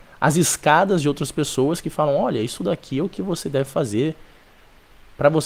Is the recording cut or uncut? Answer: uncut